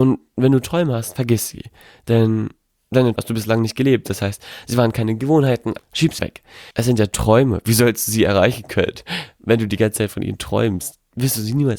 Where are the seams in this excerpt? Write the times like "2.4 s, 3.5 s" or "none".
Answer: 3.2 s, 5.8 s, 6.2 s, 6.7 s